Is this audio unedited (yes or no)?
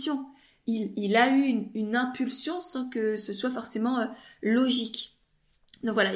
yes